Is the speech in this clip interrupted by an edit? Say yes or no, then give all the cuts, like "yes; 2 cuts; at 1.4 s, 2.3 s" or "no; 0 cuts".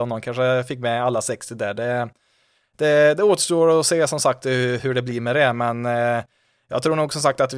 no; 0 cuts